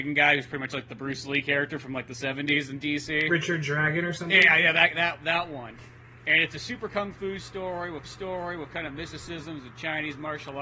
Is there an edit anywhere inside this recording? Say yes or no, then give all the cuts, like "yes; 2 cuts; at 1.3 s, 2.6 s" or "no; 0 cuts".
yes; 1 cut; at 8.0 s